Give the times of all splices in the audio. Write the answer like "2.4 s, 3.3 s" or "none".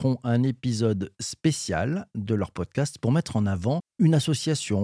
none